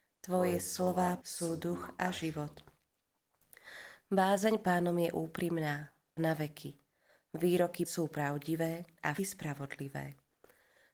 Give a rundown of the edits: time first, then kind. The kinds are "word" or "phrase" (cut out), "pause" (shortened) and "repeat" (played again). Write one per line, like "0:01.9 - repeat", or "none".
0:01.2 - word
0:04.6 - word
0:06.2 - word
0:07.8 - word
0:09.2 - word